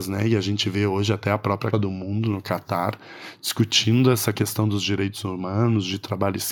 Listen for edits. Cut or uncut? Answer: cut